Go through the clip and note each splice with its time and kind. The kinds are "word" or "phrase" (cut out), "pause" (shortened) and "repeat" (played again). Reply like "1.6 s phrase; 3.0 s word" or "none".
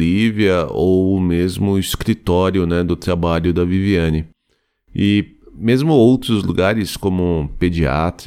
none

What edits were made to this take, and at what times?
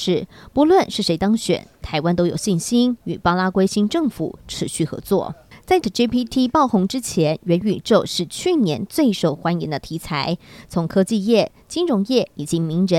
5.8 s word

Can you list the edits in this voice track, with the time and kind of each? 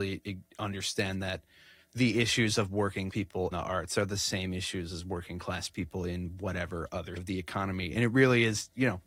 3.1 s word; 3.5 s word; 7.2 s word

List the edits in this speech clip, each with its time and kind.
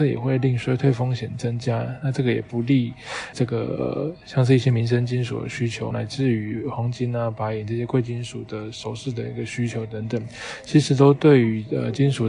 3.3 s word; 5.9 s word

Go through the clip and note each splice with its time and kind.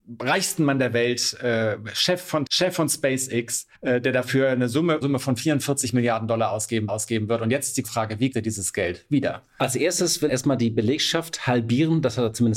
2.5 s word; 3.7 s pause; 5.0 s word; 6.9 s repeat; 7.8 s word; 8.3 s word; 10.3 s word

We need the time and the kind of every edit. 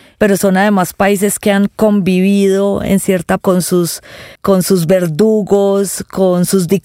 3.4 s phrase; 4.3 s pause

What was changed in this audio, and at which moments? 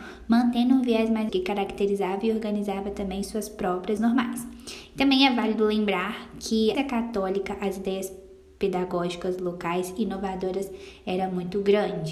1.3 s word; 4.0 s word; 6.7 s word

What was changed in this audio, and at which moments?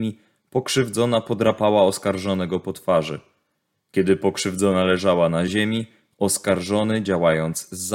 none

